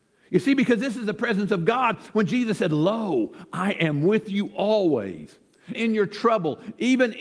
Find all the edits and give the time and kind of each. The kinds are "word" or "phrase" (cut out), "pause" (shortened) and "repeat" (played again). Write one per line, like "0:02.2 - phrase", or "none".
0:05.7 - word

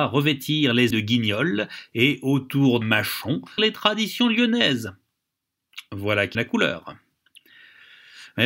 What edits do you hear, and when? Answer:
0:00.9 - word
0:02.8 - word
0:03.6 - phrase
0:06.3 - word

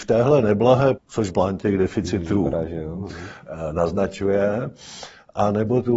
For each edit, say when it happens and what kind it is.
0:00.9 - phrase
0:01.3 - word

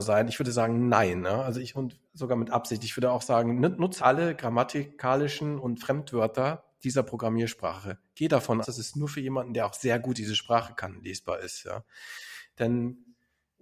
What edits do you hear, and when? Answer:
0:02.1 - pause
0:04.0 - word
0:08.6 - word

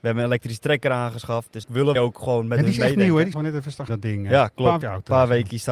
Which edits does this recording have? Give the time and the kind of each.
0:01.6 - word
0:01.9 - word
0:03.3 - word
0:03.9 - word
0:04.8 - word

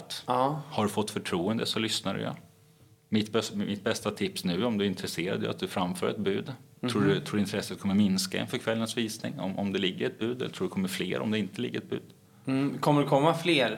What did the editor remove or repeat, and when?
none

